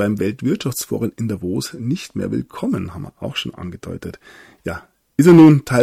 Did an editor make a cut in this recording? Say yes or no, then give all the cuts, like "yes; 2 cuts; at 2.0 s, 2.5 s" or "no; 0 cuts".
no; 0 cuts